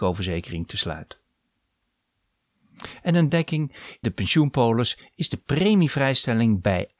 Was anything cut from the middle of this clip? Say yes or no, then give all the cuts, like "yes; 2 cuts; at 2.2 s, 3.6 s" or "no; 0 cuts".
yes; 2 cuts; at 3.3 s, 4.0 s